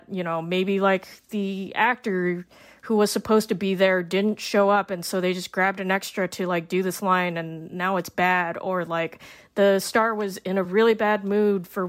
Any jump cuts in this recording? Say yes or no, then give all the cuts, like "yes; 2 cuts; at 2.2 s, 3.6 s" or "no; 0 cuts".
no; 0 cuts